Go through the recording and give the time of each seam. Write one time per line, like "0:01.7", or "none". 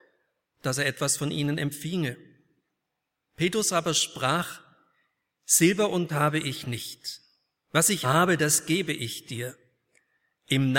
0:06.1
0:08.0